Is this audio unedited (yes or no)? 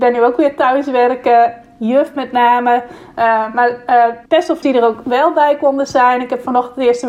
no